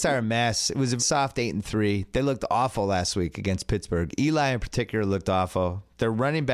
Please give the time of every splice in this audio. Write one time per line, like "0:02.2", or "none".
0:01.0

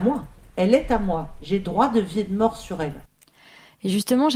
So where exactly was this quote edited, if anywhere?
none

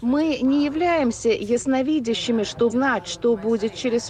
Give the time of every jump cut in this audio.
0:02.7

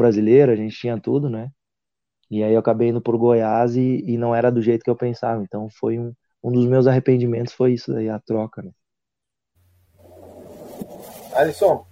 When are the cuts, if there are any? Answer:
none

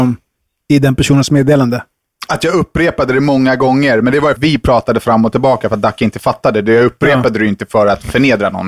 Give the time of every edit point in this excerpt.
0:04.4

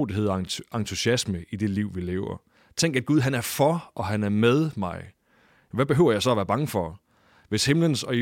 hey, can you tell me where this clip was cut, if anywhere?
none

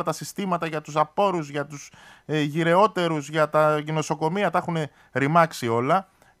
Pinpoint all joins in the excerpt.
none

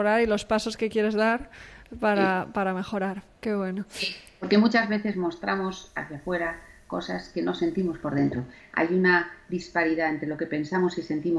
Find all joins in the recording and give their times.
none

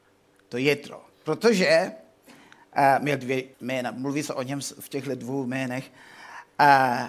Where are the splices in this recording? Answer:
0:01.1
0:03.5

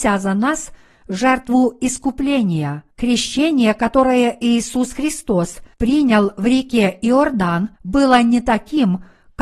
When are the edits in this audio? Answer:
0:02.9
0:05.7
0:07.8

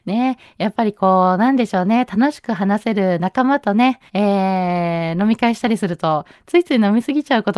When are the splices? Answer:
0:04.1

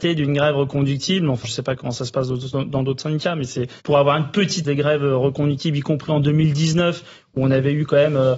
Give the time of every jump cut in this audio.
0:01.4
0:03.8
0:04.6

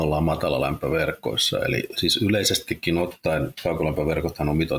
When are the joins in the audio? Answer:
0:01.9

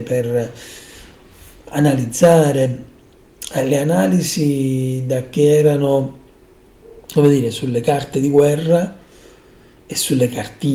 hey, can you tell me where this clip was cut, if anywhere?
none

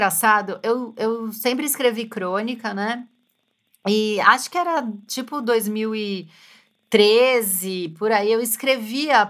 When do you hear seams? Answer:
none

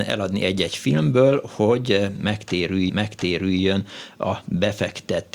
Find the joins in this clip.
0:02.9

